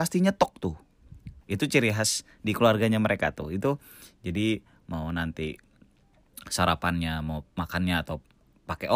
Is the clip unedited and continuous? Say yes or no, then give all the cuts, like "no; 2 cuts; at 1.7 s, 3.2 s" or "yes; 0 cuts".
no; 2 cuts; at 1.4 s, 7.5 s